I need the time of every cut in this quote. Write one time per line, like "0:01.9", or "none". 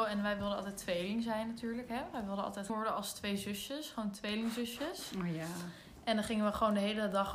0:02.7